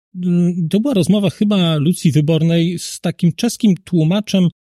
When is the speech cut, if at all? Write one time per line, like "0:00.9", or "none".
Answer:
none